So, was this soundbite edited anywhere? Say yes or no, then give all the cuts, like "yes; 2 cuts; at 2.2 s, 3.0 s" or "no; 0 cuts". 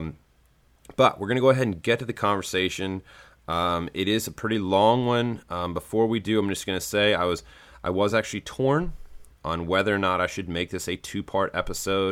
no; 0 cuts